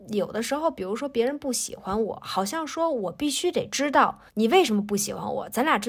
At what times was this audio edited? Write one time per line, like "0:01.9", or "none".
0:04.3